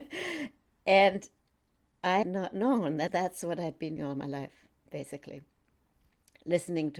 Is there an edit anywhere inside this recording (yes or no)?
yes